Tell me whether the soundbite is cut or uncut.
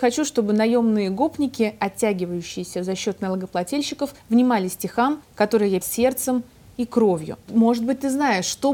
cut